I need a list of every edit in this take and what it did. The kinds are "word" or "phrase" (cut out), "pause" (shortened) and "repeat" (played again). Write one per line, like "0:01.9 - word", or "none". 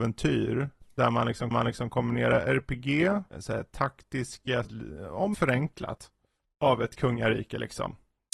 0:01.5 - repeat
0:03.3 - pause
0:04.6 - phrase
0:05.3 - word